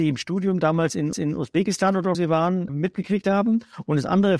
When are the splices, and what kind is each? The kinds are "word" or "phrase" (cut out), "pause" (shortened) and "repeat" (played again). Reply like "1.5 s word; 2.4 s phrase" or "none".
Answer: 1.1 s repeat; 2.1 s word; 2.7 s word